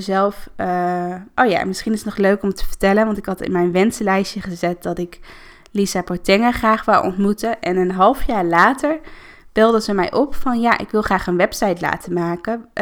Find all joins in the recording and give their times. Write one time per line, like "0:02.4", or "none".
none

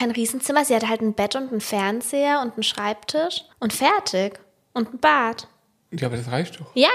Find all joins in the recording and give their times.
0:03.5

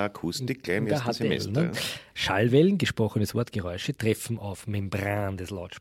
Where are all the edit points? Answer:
none

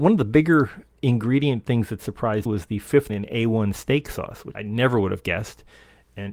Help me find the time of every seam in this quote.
0:02.5
0:03.1
0:04.5

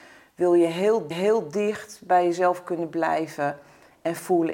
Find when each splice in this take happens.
0:01.1

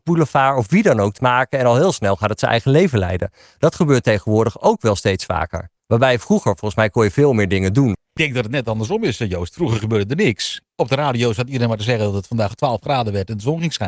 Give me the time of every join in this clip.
0:01.2
0:05.8
0:10.7

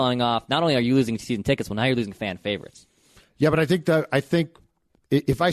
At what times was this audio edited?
none

